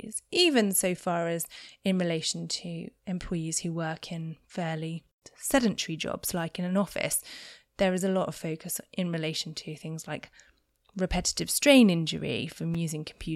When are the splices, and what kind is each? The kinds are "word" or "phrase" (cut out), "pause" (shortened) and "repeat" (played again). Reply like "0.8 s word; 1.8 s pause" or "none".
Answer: none